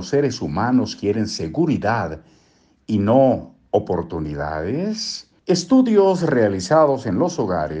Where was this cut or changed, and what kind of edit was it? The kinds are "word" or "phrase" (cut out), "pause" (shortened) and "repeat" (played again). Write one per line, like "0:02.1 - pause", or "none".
0:05.4 - pause